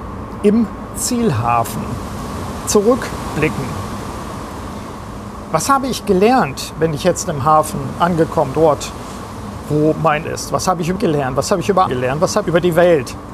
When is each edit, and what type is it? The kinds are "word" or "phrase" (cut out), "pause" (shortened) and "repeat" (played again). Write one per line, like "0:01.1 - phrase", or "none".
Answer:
0:08.5 - word
0:10.2 - word
0:11.0 - word
0:11.9 - word
0:12.4 - word